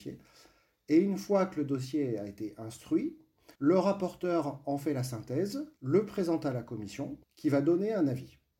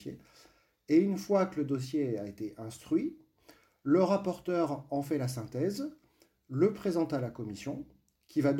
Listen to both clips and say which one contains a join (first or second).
first